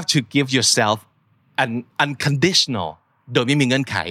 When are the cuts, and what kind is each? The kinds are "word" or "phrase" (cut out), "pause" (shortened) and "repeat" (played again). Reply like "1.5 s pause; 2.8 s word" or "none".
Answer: 1.9 s pause

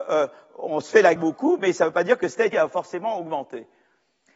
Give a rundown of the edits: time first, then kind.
1.2 s word; 2.5 s word

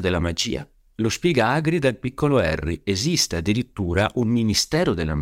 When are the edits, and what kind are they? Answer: none

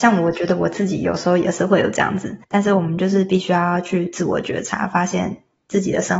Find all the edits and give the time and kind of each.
2.4 s pause

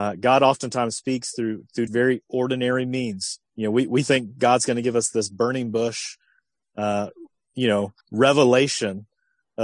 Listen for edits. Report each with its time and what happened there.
1.9 s word; 3.5 s pause; 8.0 s pause

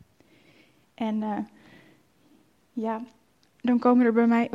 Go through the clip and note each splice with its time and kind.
none

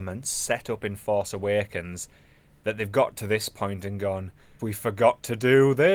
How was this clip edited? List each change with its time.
4.6 s word

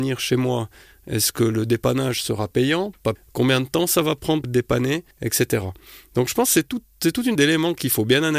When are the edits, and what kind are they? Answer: 3.2 s word; 4.4 s word; 5.1 s pause; 7.4 s word

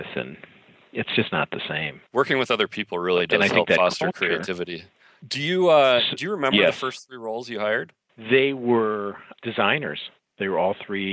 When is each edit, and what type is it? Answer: 2.1 s pause

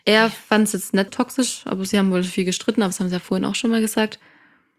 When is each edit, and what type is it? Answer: 1.1 s word

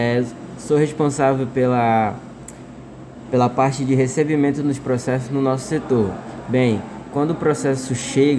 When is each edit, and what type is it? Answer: none

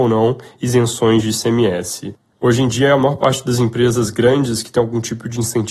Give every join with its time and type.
2.3 s pause

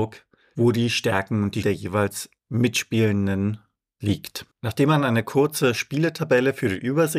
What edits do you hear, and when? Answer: 1.6 s word; 2.4 s pause; 4.5 s pause

